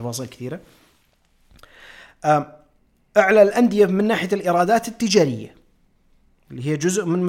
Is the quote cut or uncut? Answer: uncut